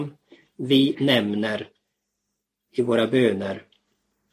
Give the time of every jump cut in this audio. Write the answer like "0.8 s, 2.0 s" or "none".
0.9 s